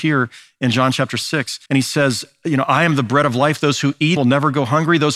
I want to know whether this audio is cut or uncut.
cut